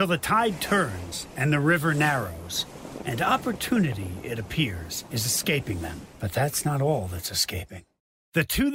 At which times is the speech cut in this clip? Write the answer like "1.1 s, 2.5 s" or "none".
6.1 s